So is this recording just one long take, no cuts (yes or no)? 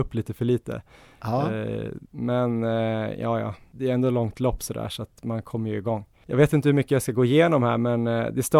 no